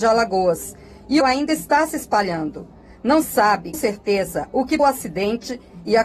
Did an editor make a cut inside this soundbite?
yes; 4 cuts; at 1.2 s, 3.2 s, 3.7 s, 4.8 s

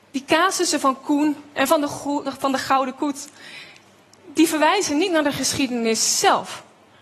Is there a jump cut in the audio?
yes; 1 cut; at 2.2 s

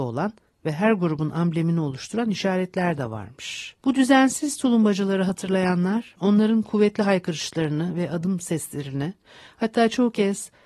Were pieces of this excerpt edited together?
yes; 1 cut; at 3.8 s

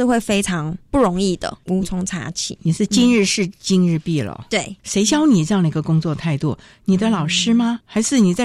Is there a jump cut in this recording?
yes; 1 cut; at 4.8 s

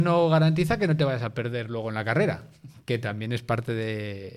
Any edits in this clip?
no; 0 cuts

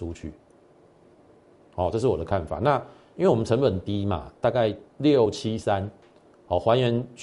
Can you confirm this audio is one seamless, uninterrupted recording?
no; 1 cut; at 4.9 s

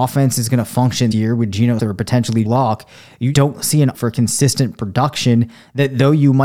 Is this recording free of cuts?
no; 5 cuts; at 1.1 s, 1.8 s, 2.4 s, 3.3 s, 3.9 s

